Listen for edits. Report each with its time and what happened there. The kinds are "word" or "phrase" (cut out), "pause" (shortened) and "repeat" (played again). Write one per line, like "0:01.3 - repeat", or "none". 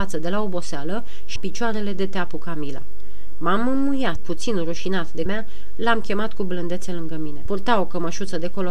0:01.4 - word
0:04.2 - word
0:05.3 - word
0:07.5 - word